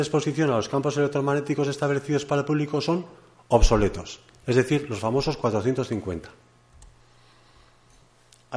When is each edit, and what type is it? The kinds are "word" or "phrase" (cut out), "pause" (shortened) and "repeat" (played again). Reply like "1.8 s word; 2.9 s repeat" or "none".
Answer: none